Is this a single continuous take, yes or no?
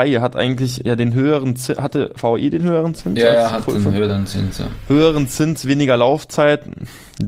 yes